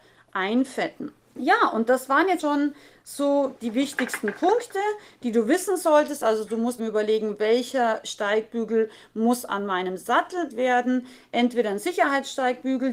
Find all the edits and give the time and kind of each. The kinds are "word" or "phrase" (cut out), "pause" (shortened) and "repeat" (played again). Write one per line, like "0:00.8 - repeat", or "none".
0:01.2 - pause
0:02.4 - word
0:03.6 - word
0:06.8 - word
0:10.5 - word

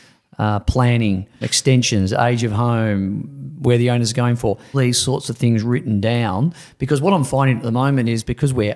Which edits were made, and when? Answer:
0:01.4 - word
0:04.7 - phrase

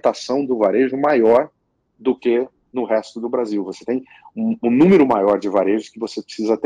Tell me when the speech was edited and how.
none

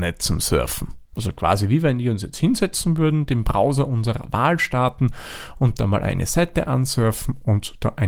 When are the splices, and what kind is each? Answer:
0:01.1 - pause

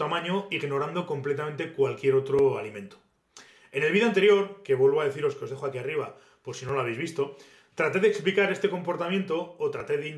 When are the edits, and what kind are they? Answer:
none

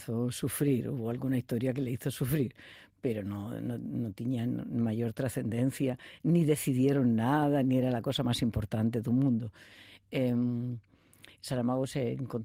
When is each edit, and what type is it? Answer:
none

